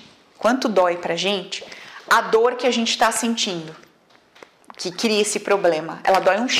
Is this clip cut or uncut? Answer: uncut